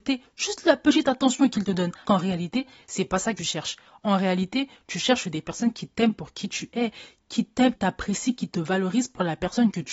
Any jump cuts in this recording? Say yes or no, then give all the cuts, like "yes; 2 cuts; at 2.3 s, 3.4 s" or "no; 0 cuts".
yes; 3 cuts; at 2.0 s, 3.4 s, 7.7 s